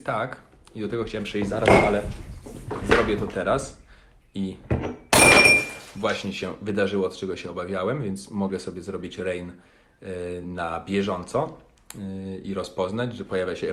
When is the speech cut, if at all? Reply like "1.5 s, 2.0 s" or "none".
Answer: none